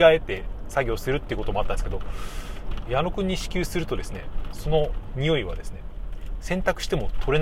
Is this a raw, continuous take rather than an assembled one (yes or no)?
no